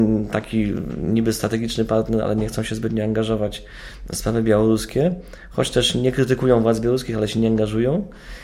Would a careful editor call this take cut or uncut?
uncut